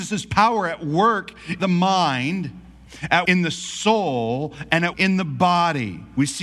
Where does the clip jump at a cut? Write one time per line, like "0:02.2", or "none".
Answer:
0:01.6
0:03.2
0:04.9